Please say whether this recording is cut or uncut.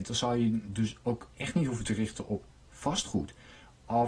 uncut